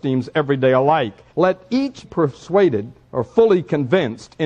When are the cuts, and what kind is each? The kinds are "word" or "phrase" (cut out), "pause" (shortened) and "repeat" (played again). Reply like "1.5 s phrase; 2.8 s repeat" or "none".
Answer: 1.3 s pause; 2.0 s word; 3.0 s pause